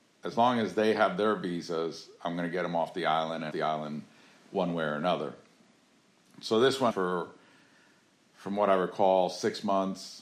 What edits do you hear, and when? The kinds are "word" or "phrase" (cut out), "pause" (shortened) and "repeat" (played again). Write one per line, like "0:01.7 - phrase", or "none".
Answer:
0:03.5 - phrase
0:06.9 - word